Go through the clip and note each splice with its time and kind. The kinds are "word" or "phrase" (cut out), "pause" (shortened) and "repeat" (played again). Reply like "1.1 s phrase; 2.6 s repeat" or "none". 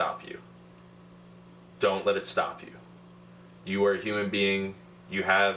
none